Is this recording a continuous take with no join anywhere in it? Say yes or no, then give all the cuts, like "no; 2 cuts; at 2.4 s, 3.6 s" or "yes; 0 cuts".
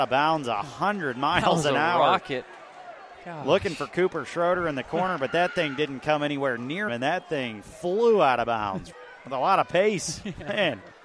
no; 2 cuts; at 6.9 s, 8.9 s